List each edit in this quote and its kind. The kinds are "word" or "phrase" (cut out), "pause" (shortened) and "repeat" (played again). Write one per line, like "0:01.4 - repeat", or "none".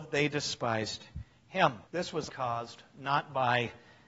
0:01.9 - pause
0:02.3 - word

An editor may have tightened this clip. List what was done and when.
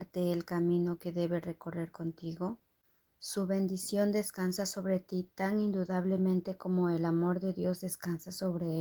none

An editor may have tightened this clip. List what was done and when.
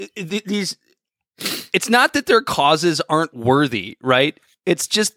none

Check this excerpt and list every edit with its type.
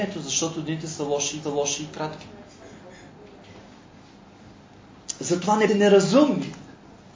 0:01.4 - repeat
0:05.7 - word

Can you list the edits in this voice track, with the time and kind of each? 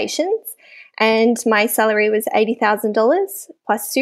none

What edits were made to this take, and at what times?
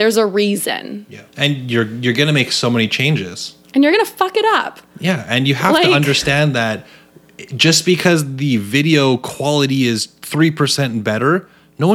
0:01.3 - pause
0:03.6 - pause

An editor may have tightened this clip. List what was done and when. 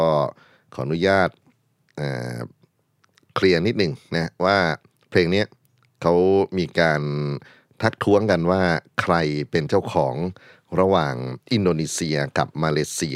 none

